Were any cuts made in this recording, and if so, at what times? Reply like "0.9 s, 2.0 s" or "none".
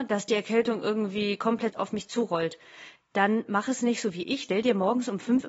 4.4 s